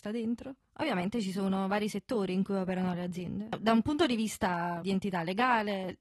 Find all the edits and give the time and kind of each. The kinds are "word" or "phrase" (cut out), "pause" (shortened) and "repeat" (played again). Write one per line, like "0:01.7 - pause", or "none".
0:04.8 - word